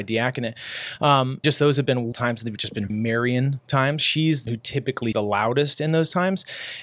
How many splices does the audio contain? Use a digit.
5